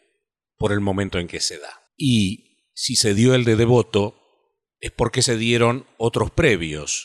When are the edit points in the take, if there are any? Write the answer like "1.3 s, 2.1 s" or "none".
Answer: 1.9 s